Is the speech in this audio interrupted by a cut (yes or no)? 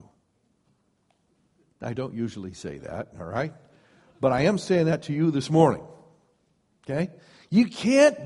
no